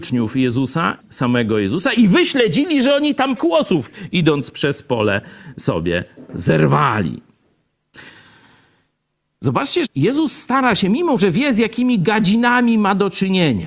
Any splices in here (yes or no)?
yes